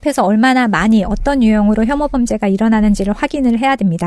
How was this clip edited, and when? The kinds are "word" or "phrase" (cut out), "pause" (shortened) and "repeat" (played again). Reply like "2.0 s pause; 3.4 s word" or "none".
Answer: none